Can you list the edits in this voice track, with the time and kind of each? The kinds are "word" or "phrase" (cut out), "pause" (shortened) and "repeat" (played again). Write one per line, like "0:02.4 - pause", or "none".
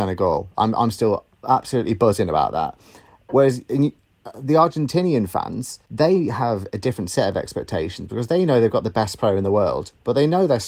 0:05.8 - pause